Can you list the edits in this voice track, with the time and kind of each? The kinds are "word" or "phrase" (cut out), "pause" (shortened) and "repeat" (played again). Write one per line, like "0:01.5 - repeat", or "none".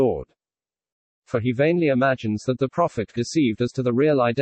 0:03.2 - word